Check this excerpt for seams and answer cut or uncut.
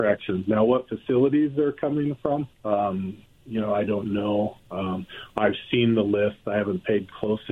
cut